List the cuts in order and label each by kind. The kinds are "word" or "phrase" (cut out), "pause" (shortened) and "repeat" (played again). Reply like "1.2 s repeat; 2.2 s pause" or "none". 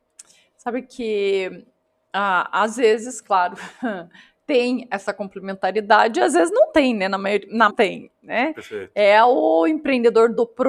7.7 s phrase